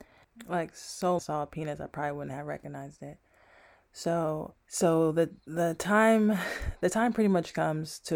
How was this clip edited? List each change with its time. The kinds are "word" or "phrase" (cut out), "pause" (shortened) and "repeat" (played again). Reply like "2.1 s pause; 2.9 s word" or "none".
1.2 s phrase; 4.6 s pause